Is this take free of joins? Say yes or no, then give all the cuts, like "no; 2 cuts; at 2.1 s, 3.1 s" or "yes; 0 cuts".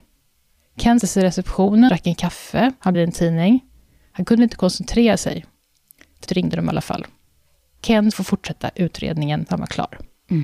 no; 6 cuts; at 1.0 s, 1.9 s, 2.9 s, 6.3 s, 8.1 s, 9.5 s